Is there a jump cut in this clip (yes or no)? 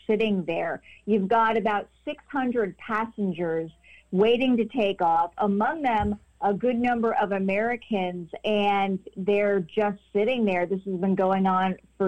no